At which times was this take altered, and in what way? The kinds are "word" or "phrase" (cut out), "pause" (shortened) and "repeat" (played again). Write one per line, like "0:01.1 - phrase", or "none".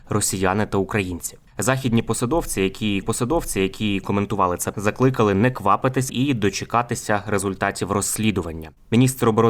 0:01.5 - pause
0:03.0 - repeat
0:04.7 - word
0:06.1 - phrase